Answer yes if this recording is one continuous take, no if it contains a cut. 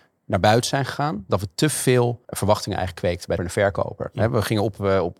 no